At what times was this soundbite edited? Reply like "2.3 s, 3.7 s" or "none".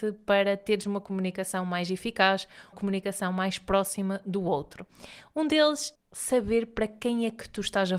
2.7 s, 5.9 s